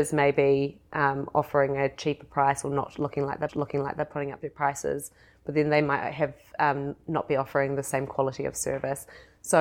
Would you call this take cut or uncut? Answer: cut